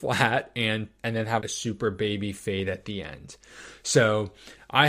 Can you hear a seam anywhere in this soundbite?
yes; 2 cuts; at 1.0 s, 1.4 s

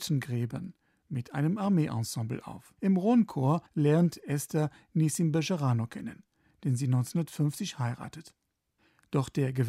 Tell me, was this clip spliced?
yes; 2 cuts; at 2.8 s, 3.7 s

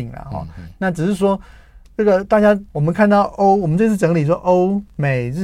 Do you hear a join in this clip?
yes; 2 cuts; at 1.8 s, 2.7 s

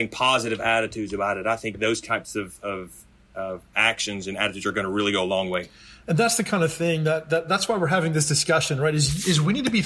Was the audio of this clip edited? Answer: no; 0 cuts

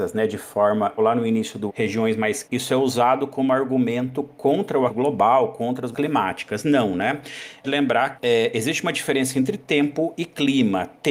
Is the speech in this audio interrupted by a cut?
yes; 7 cuts; at 1.0 s, 1.7 s, 2.4 s, 4.9 s, 5.9 s, 7.6 s, 8.2 s

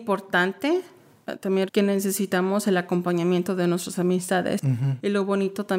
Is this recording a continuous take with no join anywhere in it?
no; 1 cut; at 1.7 s

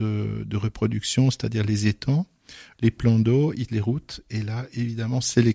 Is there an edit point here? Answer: yes; 1 cut; at 3.7 s

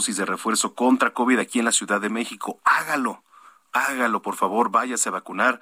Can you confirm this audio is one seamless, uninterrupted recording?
yes; 0 cuts

